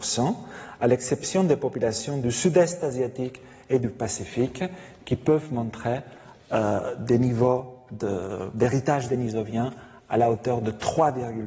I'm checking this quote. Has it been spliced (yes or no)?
no